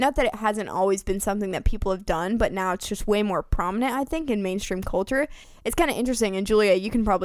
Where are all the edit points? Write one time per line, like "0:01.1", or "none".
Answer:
none